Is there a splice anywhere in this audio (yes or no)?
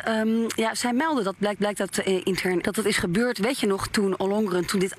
yes